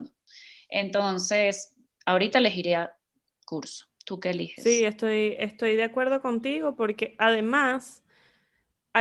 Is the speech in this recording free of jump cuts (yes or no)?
yes